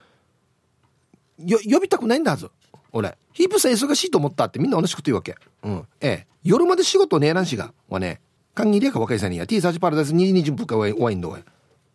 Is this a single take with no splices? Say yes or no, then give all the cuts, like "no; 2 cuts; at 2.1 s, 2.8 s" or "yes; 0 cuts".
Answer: no; 3 cuts; at 3.2 s, 6.4 s, 8.4 s